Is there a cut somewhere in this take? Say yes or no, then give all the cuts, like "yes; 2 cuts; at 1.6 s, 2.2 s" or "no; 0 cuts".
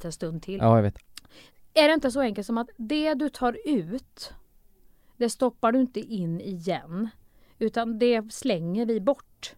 no; 0 cuts